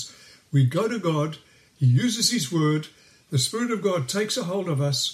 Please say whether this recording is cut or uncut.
uncut